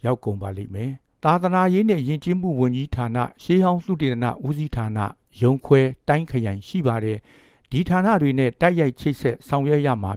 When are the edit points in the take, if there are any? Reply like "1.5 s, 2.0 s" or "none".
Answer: 1.2 s